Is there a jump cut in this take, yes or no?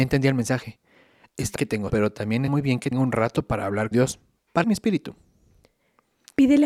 yes